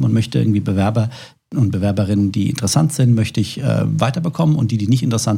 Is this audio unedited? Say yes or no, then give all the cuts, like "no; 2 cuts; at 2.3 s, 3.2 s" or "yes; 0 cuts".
yes; 0 cuts